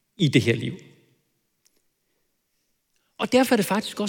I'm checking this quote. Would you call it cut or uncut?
uncut